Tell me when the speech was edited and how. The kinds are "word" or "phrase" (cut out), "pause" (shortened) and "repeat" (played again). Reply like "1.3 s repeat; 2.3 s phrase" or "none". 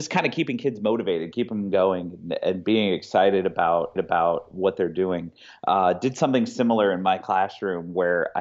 4.0 s repeat